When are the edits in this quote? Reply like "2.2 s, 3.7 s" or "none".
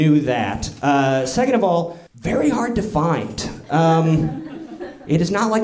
2.1 s